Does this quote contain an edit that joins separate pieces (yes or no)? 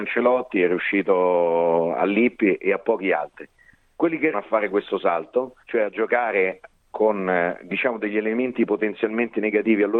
yes